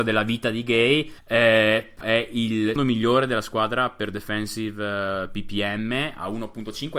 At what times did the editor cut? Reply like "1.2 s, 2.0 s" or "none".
1.2 s, 2.0 s, 2.8 s